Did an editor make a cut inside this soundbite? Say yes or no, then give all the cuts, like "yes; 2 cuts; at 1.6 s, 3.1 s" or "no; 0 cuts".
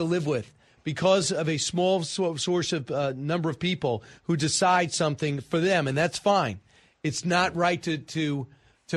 no; 0 cuts